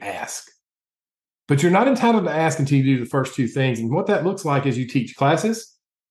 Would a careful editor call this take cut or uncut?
uncut